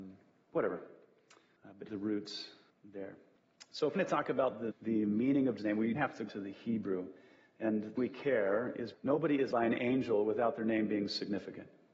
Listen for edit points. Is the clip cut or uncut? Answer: cut